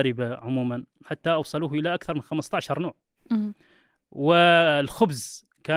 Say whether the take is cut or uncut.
uncut